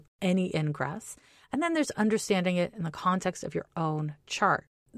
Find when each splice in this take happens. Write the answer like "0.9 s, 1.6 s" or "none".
none